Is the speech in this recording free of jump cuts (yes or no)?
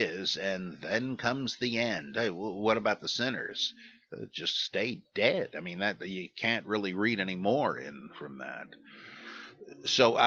yes